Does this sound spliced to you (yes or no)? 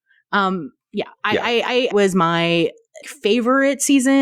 yes